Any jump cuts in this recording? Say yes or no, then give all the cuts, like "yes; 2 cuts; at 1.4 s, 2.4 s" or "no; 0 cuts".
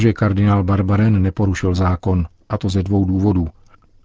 no; 0 cuts